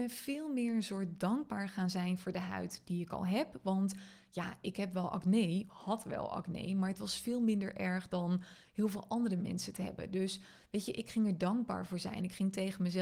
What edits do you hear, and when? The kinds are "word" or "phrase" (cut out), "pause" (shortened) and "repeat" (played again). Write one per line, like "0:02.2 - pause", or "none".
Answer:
0:05.7 - word